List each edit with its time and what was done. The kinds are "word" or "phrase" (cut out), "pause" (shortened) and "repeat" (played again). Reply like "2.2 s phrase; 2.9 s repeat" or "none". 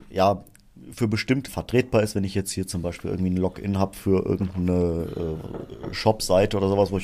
1.5 s word